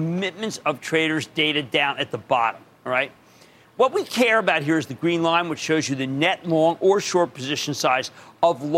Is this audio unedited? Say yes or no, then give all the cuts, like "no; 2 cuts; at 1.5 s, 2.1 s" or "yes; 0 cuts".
yes; 0 cuts